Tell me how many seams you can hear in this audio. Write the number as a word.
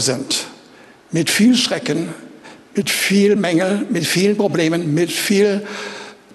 zero